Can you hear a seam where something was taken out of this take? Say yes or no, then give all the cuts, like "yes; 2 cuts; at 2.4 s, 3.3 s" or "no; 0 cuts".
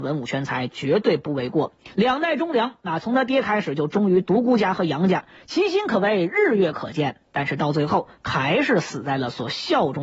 yes; 1 cut; at 1.9 s